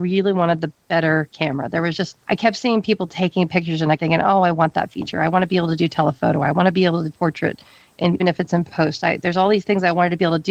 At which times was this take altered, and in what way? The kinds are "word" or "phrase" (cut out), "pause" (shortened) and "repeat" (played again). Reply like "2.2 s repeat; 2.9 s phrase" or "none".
2.2 s pause; 4.0 s word; 7.1 s word; 8.2 s word